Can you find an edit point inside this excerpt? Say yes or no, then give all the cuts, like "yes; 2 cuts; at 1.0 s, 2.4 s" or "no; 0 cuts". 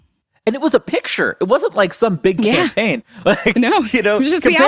no; 0 cuts